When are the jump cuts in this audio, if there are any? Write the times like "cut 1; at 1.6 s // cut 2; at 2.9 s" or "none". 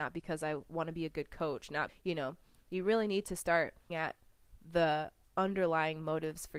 cut 1; at 1.9 s // cut 2; at 3.9 s